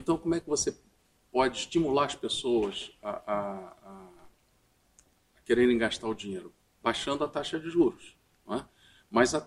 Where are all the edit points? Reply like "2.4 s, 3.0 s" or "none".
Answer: none